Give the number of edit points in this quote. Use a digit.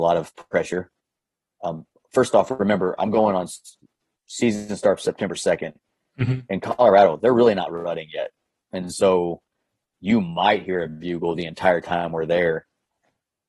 0